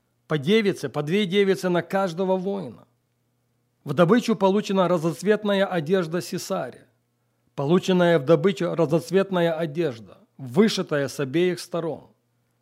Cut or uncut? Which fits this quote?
uncut